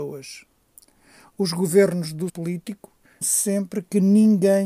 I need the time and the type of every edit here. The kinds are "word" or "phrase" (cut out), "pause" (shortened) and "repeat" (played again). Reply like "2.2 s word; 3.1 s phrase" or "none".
2.3 s word; 3.2 s word